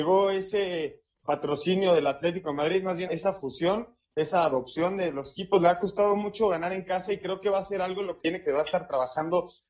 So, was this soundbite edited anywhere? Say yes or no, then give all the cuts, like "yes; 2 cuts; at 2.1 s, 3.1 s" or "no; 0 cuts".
yes; 2 cuts; at 3.1 s, 8.2 s